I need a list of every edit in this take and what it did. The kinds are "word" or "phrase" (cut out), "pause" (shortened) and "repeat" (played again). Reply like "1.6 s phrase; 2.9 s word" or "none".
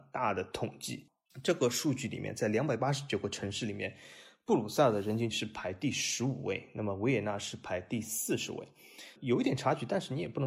5.3 s word; 9.2 s word